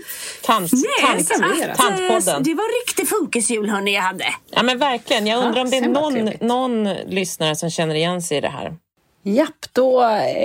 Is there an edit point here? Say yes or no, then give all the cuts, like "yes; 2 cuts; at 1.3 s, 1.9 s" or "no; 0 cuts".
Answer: no; 0 cuts